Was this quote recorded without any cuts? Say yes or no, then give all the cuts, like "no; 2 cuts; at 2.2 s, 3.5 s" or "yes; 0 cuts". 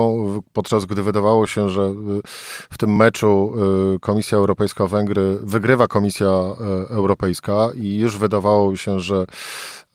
yes; 0 cuts